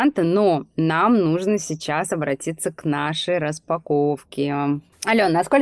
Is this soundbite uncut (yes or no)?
yes